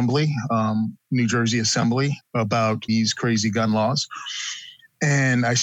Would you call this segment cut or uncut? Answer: cut